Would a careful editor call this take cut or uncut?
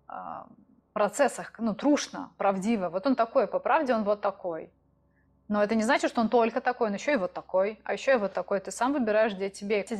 uncut